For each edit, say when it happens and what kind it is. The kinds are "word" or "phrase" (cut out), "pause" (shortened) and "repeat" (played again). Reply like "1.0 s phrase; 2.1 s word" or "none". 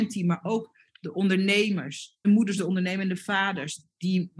2.2 s phrase